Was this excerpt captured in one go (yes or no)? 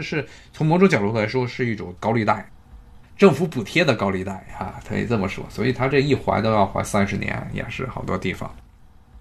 no